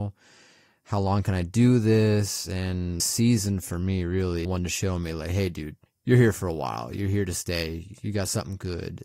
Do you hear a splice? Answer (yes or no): yes